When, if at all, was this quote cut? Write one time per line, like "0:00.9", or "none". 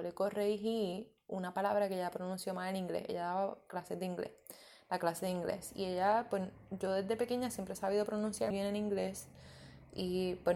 0:08.5